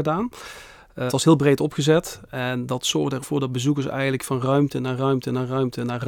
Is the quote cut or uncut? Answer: cut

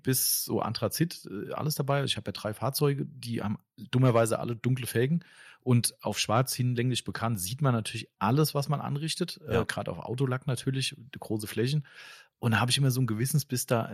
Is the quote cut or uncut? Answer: uncut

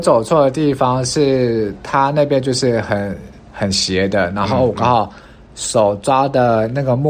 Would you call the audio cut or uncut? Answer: uncut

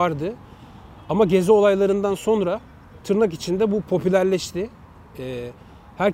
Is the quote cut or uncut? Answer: uncut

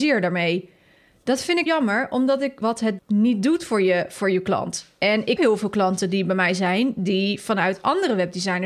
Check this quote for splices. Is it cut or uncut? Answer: cut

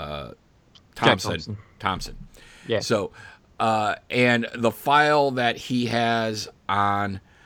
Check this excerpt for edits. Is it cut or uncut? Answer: uncut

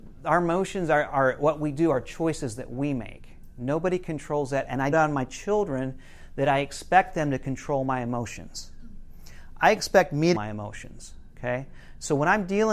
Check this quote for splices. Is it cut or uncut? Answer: cut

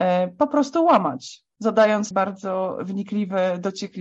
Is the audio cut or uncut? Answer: cut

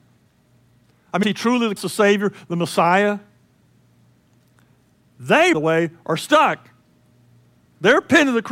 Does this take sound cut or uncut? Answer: cut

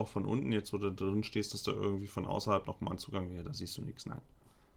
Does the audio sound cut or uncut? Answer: uncut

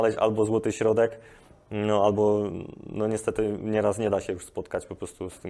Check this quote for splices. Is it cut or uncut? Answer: uncut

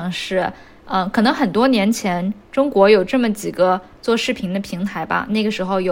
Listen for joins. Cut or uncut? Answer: uncut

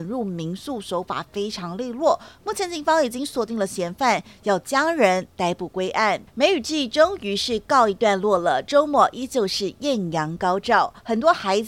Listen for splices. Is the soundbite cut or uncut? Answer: cut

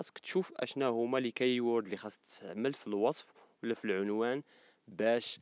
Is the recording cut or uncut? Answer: uncut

